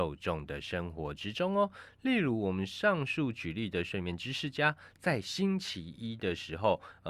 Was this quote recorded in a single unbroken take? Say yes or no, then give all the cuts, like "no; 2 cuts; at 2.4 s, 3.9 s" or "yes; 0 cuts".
yes; 0 cuts